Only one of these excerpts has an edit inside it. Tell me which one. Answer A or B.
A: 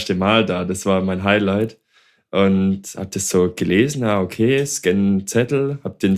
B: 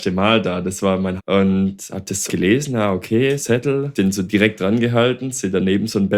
B